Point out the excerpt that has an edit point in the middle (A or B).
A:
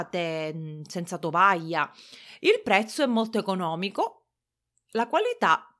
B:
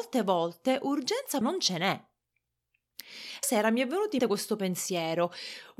B